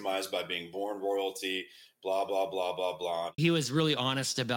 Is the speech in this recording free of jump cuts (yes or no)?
no